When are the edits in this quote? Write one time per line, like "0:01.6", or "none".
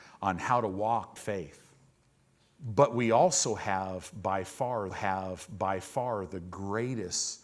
0:01.2
0:01.9
0:04.9